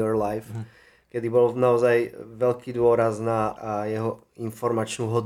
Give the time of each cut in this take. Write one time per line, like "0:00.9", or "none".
0:03.6

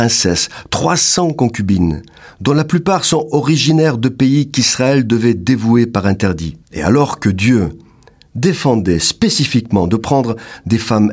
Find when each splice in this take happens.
0:06.6

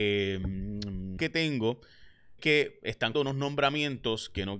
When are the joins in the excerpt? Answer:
0:01.2
0:02.4
0:03.1

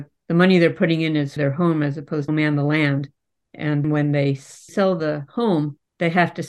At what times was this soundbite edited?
0:01.4
0:02.3
0:03.8

